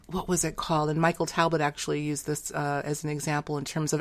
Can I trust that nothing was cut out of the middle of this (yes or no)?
yes